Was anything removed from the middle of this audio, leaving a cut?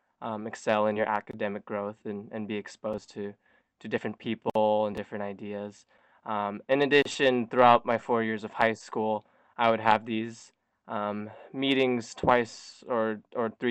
no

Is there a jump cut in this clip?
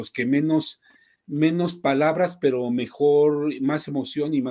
no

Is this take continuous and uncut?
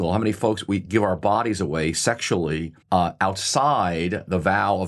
no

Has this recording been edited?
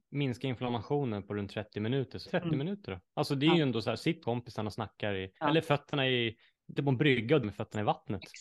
yes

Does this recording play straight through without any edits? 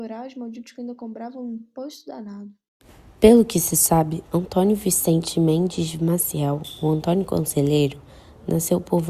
yes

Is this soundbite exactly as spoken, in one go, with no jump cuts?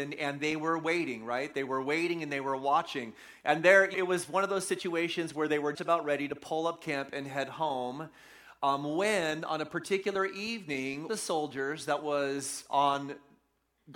no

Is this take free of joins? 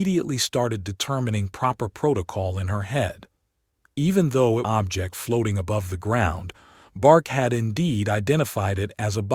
no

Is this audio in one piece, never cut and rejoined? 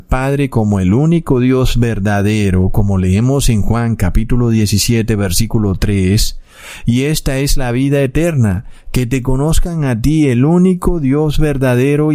yes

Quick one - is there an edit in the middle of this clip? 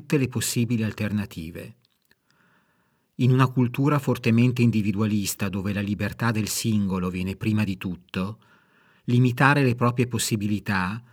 no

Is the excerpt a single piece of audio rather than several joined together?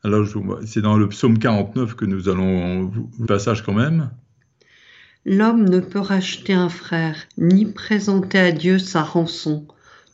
no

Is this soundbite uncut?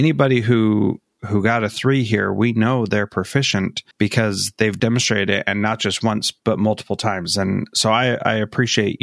no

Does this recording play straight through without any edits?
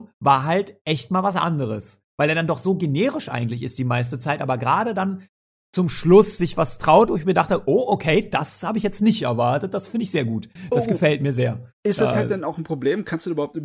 yes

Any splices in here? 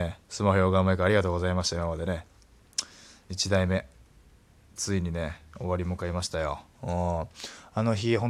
no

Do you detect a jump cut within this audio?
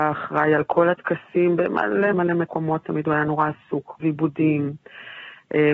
yes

